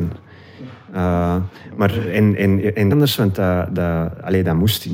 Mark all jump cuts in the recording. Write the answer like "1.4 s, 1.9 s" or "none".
2.9 s

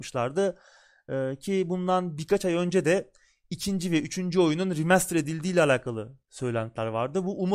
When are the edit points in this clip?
none

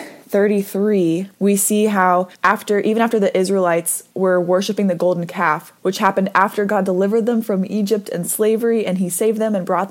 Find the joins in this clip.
1.3 s, 2.3 s, 4.1 s, 5.8 s

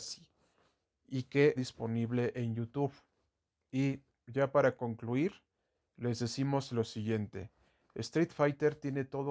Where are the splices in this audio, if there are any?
1.6 s

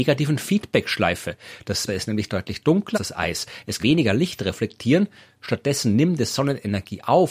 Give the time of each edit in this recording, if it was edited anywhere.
1.9 s, 2.9 s, 3.8 s

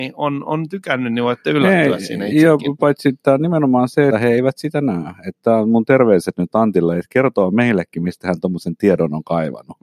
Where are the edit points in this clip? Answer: 4.1 s

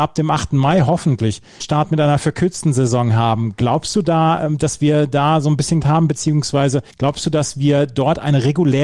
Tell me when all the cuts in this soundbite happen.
1.6 s, 5.8 s, 6.9 s

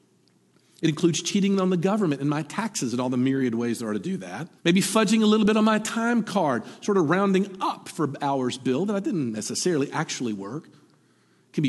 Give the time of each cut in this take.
4.6 s

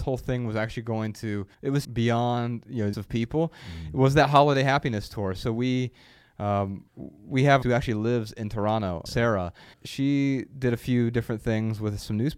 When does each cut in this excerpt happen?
1.5 s, 1.8 s, 2.9 s, 6.9 s, 7.6 s, 9.1 s, 9.7 s

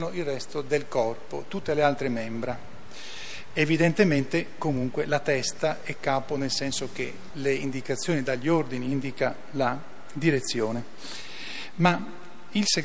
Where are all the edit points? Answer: 7.3 s

